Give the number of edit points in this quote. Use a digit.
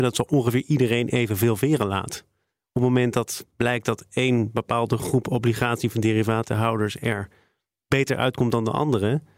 0